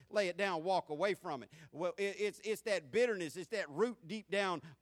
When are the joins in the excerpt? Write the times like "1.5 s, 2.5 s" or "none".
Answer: none